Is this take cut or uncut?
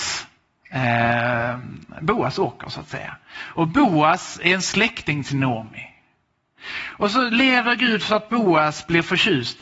uncut